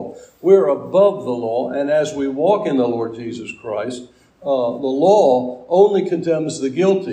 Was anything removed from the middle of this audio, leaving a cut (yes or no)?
no